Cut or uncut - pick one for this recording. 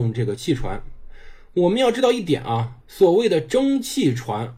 cut